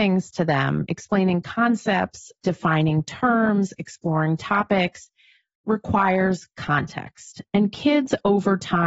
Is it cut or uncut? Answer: uncut